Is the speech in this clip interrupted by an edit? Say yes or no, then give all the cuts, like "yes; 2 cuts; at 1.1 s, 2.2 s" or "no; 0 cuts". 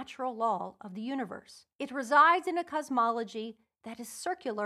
yes; 1 cut; at 1.7 s